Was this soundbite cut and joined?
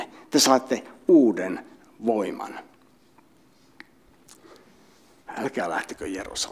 no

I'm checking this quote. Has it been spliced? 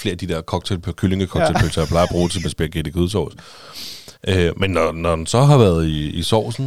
yes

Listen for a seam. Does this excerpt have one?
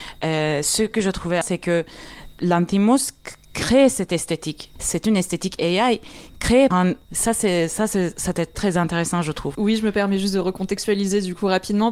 yes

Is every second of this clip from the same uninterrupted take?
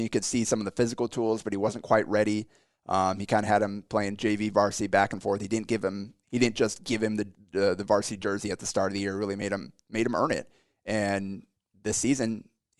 yes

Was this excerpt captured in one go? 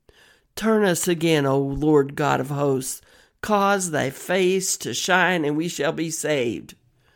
yes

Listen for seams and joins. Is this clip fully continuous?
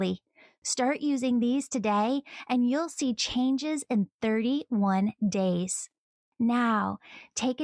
yes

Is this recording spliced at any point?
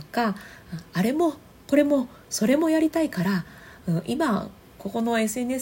no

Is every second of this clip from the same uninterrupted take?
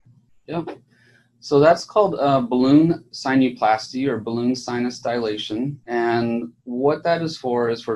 no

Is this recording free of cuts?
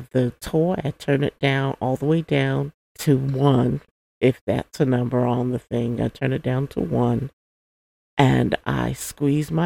no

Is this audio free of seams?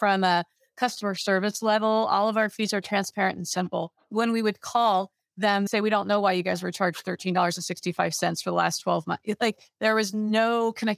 no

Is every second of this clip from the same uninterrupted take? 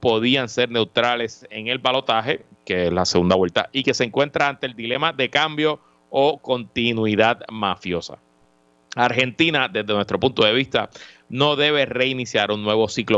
yes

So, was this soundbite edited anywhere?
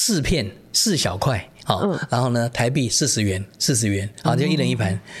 no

